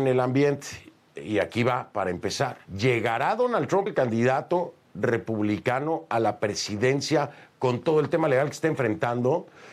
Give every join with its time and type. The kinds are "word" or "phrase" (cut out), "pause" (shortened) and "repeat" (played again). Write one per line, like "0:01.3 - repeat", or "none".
0:02.6 - pause
0:03.9 - phrase